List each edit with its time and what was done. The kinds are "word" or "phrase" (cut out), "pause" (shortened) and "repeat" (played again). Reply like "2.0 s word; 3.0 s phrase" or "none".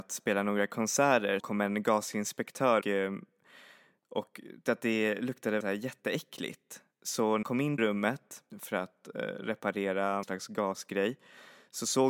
1.4 s word; 2.8 s word; 4.7 s word; 5.6 s word; 7.4 s word; 7.8 s word; 8.5 s word; 10.2 s word